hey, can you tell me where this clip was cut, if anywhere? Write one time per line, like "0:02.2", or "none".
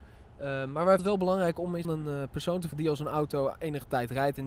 0:01.0
0:01.8
0:02.7